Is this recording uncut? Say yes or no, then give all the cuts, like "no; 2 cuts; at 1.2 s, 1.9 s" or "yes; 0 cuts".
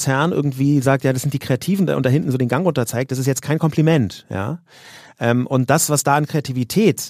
yes; 0 cuts